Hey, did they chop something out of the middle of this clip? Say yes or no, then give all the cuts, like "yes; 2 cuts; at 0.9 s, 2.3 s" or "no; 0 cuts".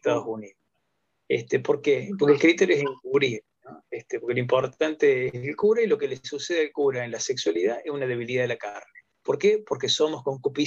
yes; 1 cut; at 9.1 s